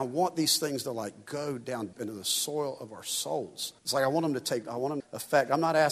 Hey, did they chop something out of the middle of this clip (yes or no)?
yes